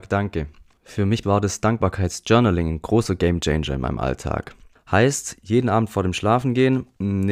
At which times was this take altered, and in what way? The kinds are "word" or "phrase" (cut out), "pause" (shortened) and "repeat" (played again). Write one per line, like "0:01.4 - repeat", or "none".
0:01.2 - word